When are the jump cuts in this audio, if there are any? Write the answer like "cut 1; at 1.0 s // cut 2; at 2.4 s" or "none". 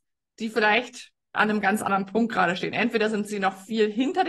none